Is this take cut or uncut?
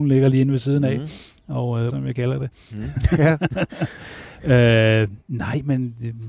cut